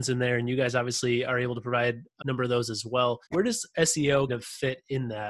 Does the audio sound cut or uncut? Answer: cut